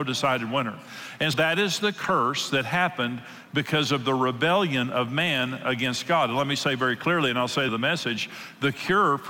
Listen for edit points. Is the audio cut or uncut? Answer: cut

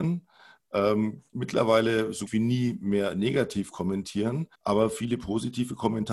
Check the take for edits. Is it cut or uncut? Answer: cut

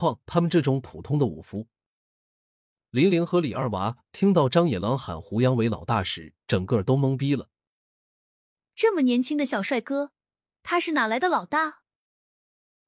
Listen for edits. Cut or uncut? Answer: cut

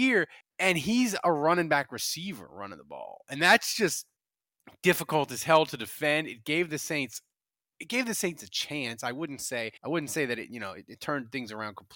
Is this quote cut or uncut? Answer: cut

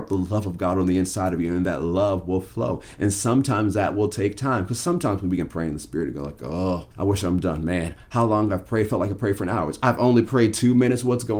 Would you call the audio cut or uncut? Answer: cut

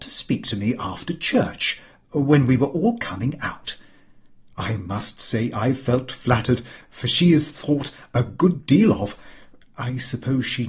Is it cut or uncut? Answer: uncut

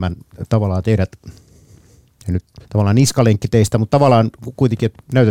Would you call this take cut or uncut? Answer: cut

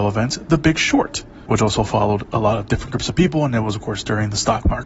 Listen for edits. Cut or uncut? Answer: uncut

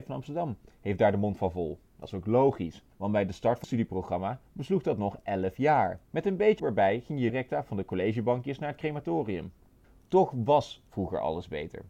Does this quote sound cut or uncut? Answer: cut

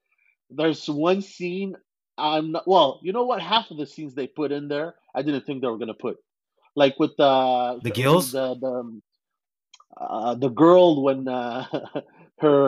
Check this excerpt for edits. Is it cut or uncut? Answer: uncut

